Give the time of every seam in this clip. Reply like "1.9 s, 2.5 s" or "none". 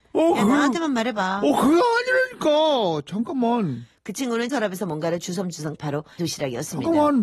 4.5 s, 5.8 s, 6.2 s